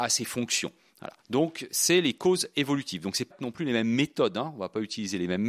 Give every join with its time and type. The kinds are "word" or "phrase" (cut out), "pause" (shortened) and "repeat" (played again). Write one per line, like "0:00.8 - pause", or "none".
0:01.2 - pause
0:03.3 - word